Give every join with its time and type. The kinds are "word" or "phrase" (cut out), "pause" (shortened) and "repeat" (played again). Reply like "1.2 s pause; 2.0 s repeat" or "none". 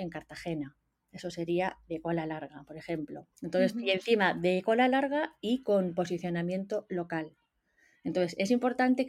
3.3 s pause